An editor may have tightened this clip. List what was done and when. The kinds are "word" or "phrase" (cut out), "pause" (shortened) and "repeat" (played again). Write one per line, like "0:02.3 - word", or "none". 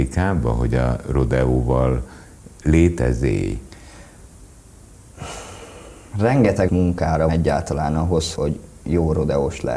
0:06.7 - word
0:07.3 - phrase
0:08.4 - word

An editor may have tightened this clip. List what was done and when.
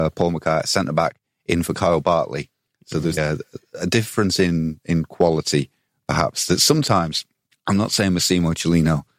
0:03.2 - word

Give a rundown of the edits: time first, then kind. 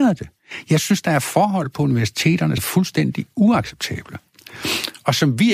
0:02.6 - word

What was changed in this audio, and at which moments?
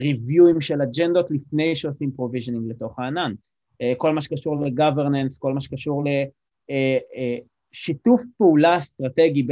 none

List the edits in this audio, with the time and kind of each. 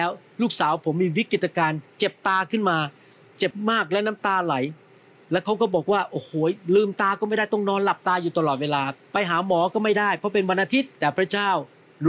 none

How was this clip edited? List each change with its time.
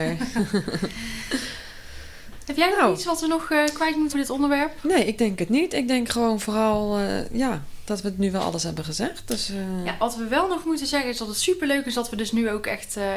0:04.1 - word

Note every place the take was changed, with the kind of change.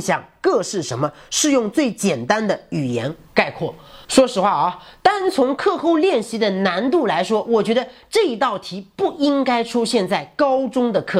none

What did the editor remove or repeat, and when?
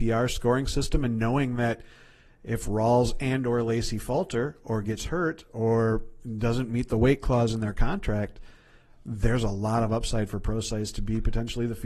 none

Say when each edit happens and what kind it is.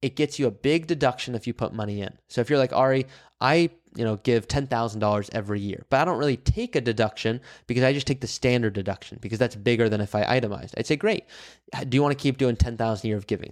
none

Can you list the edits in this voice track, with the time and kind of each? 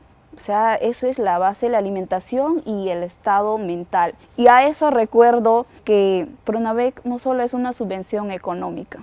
0:04.2 - pause
0:05.8 - word
0:06.4 - pause

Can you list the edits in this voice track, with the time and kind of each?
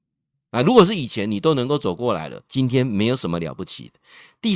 0:02.5 - pause

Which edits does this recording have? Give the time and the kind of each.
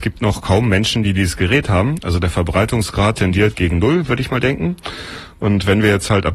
none

